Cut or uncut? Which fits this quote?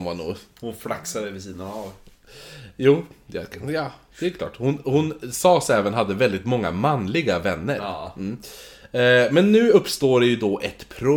uncut